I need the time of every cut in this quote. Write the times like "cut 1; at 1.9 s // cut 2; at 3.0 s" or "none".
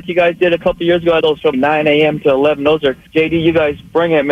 cut 1; at 1.2 s // cut 2; at 1.5 s // cut 3; at 3.1 s